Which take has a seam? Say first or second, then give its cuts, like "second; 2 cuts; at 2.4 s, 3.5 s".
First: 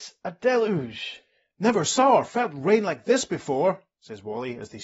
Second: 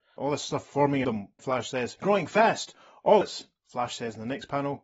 second; 4 cuts; at 1.0 s, 1.4 s, 2.0 s, 3.2 s